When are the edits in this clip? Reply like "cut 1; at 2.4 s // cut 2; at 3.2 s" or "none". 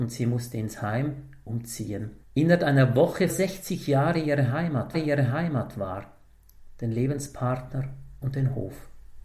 cut 1; at 2.2 s // cut 2; at 3.3 s // cut 3; at 4.9 s